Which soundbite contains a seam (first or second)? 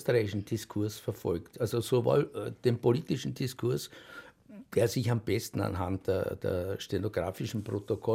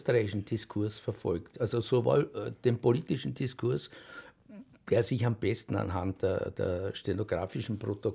first